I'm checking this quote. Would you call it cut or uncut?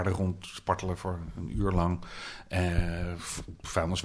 uncut